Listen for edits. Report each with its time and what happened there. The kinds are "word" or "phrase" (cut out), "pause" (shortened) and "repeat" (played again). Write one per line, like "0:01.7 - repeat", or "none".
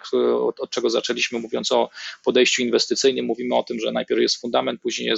none